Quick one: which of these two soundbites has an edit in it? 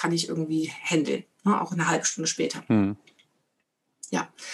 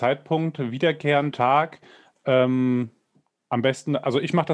second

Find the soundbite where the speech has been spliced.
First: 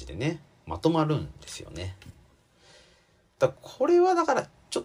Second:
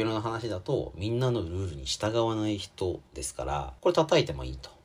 second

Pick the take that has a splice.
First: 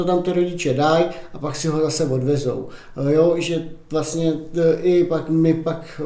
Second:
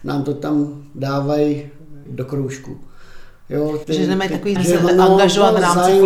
second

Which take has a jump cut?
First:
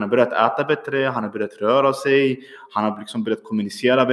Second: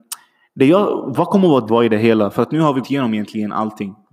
second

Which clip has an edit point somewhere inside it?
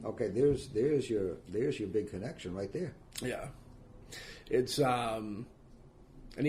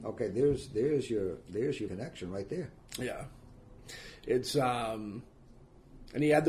second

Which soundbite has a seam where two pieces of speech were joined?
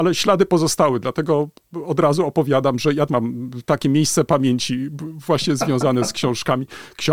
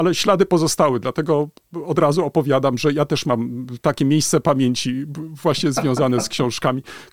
first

